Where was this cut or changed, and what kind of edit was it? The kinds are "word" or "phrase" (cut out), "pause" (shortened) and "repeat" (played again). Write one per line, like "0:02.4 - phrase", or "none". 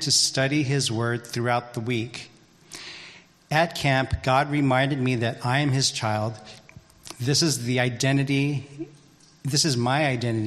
none